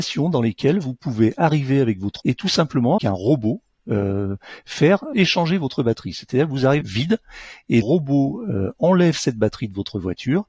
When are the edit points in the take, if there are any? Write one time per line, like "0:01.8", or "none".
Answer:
0:02.2
0:03.0
0:05.1
0:06.8
0:07.8